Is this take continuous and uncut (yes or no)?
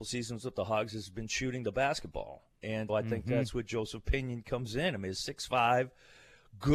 no